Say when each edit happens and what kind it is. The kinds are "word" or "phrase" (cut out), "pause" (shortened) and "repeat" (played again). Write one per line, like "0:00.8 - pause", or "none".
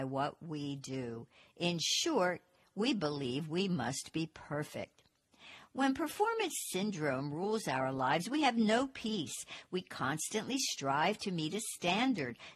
none